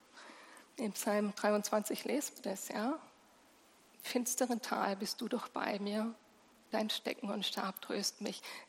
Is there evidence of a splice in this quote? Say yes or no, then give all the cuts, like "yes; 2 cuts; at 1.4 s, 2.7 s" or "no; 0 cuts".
no; 0 cuts